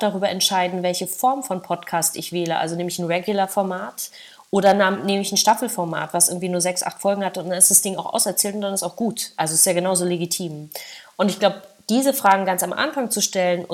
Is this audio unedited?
yes; 0 cuts

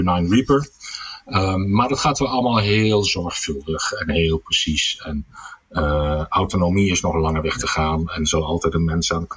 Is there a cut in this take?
no; 0 cuts

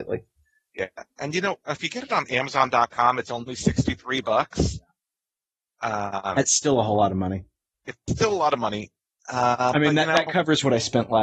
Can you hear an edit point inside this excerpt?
no; 0 cuts

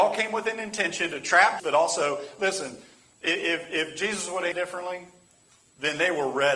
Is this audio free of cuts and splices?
no; 2 cuts; at 1.6 s, 4.5 s

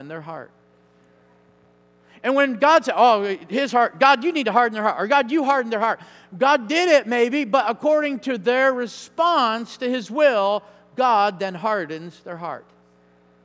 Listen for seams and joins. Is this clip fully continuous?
yes; 0 cuts

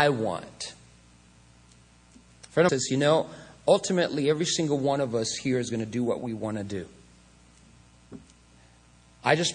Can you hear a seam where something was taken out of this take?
yes; 1 cut; at 2.7 s

